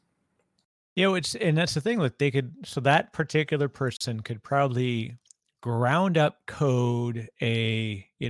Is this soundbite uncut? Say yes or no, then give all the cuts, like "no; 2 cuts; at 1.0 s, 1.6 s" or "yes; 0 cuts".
yes; 0 cuts